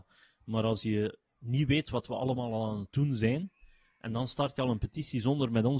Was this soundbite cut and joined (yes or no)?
no